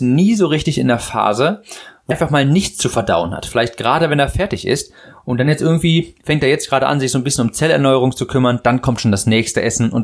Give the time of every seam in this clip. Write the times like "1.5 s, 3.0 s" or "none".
2.1 s